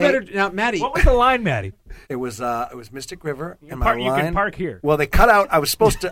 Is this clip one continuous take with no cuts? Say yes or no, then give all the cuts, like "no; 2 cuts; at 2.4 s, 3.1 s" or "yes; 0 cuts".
no; 2 cuts; at 2.0 s, 2.7 s